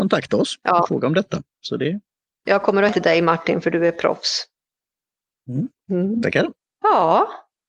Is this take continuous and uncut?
no; 2 cuts; at 2.2 s, 2.9 s

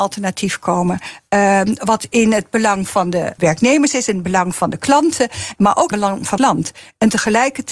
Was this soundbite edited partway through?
yes; 3 cuts; at 3.4 s, 5.9 s, 6.4 s

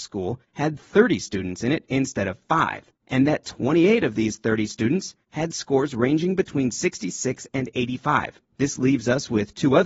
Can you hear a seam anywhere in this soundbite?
yes; 1 cut; at 8.4 s

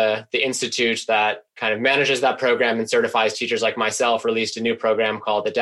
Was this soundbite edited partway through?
no; 0 cuts

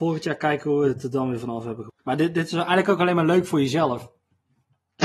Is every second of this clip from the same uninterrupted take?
no; 1 cut; at 2.0 s

